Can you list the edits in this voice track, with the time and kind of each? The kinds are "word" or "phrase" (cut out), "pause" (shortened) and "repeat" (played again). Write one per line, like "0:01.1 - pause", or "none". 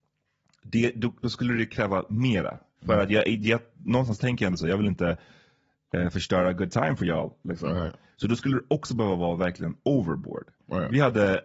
none